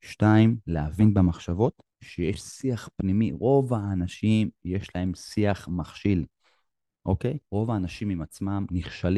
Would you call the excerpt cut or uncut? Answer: cut